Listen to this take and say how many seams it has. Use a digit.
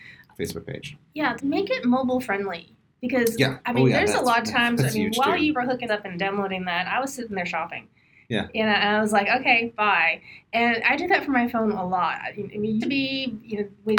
3